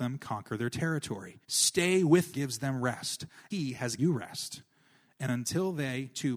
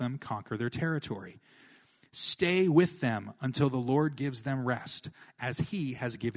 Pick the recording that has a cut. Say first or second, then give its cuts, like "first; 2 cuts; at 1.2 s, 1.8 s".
first; 4 cuts; at 1.4 s, 2.3 s, 3.5 s, 4.0 s